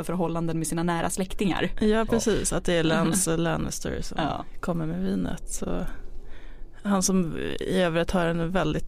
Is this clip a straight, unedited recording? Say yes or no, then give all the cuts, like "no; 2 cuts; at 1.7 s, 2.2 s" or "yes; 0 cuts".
yes; 0 cuts